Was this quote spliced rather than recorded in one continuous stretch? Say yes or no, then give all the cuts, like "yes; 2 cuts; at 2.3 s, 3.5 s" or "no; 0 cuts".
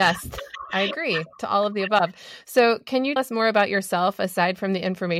yes; 1 cut; at 3.2 s